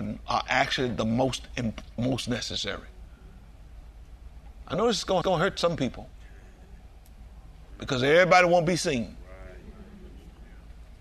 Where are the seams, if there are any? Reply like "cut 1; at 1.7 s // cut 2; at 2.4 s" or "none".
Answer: cut 1; at 5.2 s

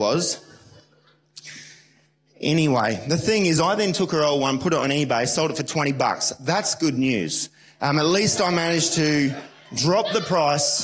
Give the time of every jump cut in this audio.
none

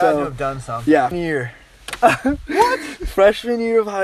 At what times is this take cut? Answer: cut 1; at 1.1 s

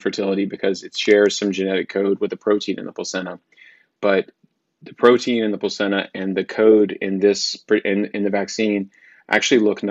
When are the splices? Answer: none

